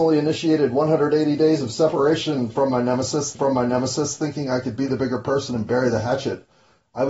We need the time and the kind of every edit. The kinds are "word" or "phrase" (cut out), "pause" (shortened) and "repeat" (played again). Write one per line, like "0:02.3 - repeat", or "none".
0:03.3 - repeat